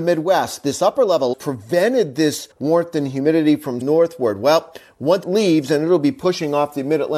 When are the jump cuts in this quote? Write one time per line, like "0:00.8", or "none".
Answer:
0:01.3
0:02.5
0:03.8
0:05.2